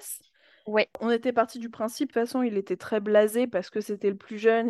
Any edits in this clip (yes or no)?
yes